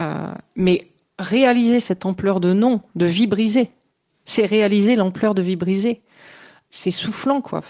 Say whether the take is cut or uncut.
uncut